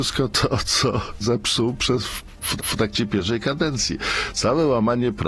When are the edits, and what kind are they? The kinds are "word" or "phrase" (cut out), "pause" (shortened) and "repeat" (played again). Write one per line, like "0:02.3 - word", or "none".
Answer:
0:01.2 - word
0:02.6 - repeat